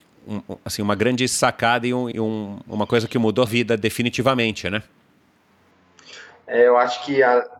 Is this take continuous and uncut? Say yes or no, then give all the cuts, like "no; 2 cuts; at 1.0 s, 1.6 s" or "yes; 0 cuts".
no; 2 cuts; at 2.1 s, 3.5 s